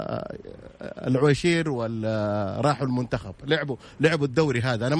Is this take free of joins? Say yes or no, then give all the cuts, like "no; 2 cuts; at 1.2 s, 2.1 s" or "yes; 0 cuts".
yes; 0 cuts